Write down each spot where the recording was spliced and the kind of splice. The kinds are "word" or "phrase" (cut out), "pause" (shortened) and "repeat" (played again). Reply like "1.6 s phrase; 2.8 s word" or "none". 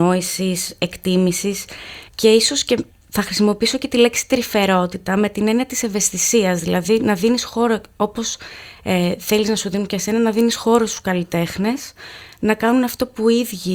2.1 s pause; 2.9 s pause